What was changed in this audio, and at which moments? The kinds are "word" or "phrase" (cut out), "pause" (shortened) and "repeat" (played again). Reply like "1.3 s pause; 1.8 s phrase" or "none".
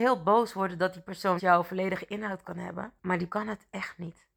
1.4 s word; 3.0 s pause; 3.3 s word

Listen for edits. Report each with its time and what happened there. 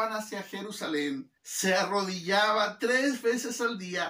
1.4 s pause

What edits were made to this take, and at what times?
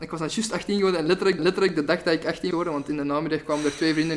1.4 s repeat; 2.5 s word

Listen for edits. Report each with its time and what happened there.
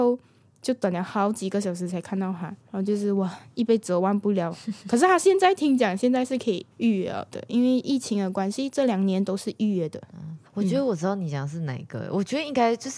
2.6 s pause; 6.7 s pause; 10.5 s pause

